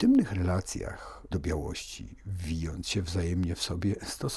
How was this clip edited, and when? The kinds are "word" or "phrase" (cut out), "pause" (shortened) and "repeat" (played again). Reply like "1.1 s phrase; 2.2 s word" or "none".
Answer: 1.3 s word